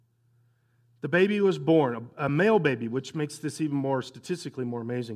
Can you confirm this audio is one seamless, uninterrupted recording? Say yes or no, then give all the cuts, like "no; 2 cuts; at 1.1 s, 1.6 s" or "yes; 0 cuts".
yes; 0 cuts